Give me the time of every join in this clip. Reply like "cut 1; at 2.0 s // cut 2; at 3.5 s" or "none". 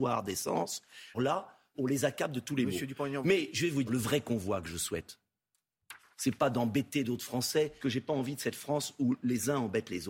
cut 1; at 1.1 s // cut 2; at 1.7 s // cut 3; at 3.9 s // cut 4; at 7.8 s